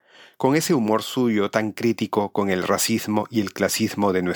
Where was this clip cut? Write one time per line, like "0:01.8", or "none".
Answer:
none